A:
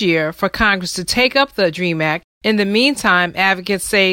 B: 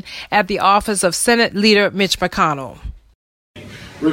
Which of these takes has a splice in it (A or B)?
A